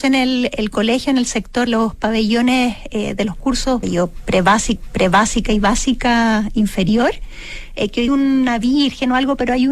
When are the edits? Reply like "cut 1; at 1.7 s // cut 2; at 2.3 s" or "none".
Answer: cut 1; at 1.7 s // cut 2; at 3.8 s // cut 3; at 4.8 s // cut 4; at 8.1 s